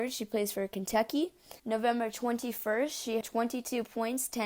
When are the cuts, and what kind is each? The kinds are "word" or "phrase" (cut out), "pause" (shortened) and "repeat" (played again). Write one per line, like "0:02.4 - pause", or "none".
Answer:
0:01.6 - pause
0:03.2 - word